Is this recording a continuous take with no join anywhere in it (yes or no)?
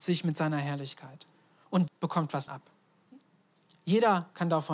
no